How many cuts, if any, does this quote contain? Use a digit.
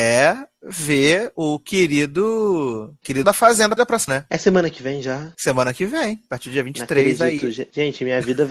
3